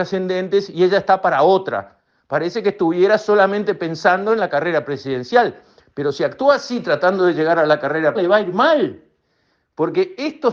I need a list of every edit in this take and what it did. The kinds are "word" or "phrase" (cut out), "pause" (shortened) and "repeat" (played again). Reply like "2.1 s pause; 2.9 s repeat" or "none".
8.1 s word